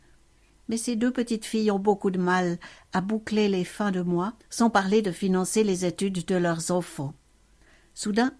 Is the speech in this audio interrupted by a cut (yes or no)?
yes